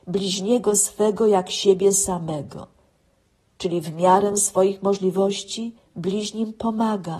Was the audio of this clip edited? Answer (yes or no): no